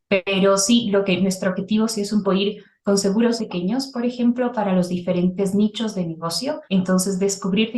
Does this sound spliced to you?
yes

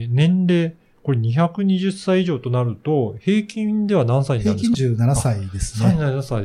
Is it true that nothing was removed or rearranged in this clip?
no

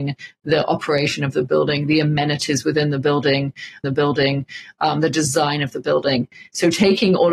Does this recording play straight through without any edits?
no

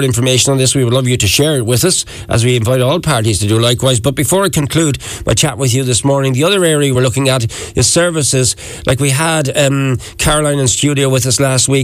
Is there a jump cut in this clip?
no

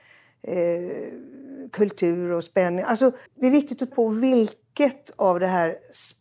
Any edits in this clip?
yes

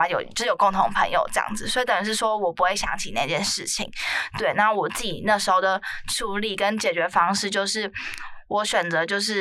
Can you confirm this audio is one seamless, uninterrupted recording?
yes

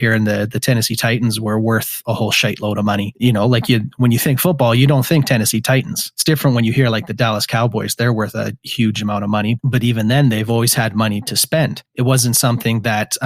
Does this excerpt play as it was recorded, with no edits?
yes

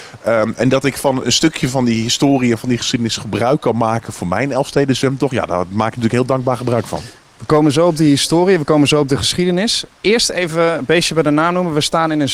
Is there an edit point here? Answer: no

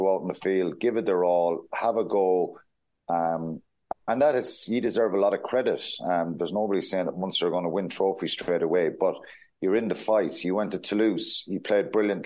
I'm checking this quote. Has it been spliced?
no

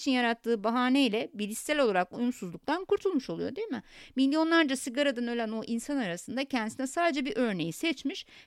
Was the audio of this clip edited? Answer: no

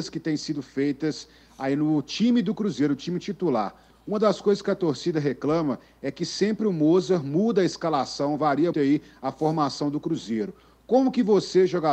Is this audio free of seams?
no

